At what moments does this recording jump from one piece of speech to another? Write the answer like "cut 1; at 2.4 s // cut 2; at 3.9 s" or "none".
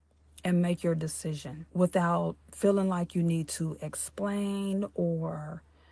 cut 1; at 1.7 s